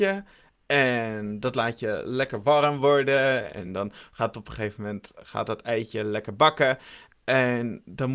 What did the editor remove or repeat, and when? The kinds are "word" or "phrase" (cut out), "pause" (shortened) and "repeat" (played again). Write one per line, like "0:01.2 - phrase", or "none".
none